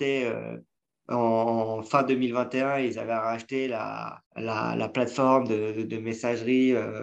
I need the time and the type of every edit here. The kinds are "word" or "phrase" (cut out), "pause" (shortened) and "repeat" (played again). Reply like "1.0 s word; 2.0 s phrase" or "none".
4.3 s pause